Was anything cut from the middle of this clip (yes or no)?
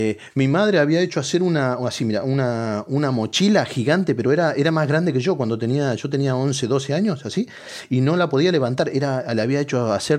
no